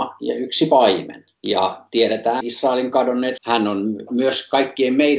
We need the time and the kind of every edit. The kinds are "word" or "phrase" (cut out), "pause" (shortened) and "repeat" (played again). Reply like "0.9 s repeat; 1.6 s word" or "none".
1.3 s pause; 2.4 s word; 3.4 s word